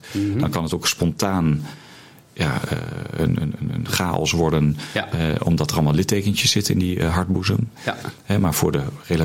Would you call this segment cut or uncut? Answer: uncut